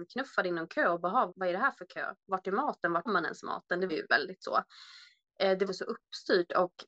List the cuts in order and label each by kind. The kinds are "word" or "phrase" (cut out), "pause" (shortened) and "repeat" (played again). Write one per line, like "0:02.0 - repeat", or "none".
0:01.3 - word
0:03.1 - word
0:03.9 - word
0:05.7 - word

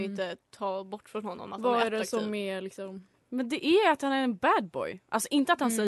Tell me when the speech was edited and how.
none

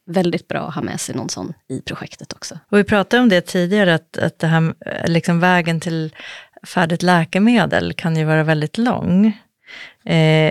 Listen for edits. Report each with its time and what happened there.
0:02.6 - pause

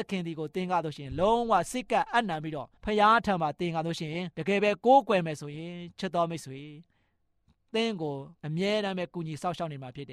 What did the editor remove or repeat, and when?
0:02.8 - pause
0:04.3 - pause
0:08.4 - pause

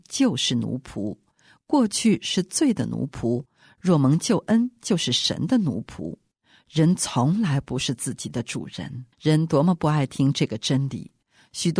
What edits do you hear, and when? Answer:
0:09.1 - pause

